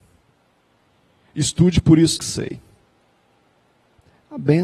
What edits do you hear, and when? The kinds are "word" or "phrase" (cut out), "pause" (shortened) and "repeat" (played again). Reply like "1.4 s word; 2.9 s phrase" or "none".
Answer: 2.2 s word